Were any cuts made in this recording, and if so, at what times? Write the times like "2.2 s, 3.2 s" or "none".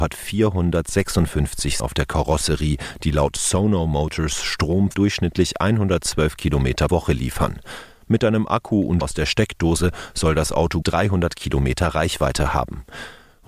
1.8 s, 4.9 s, 6.9 s, 9.0 s, 10.8 s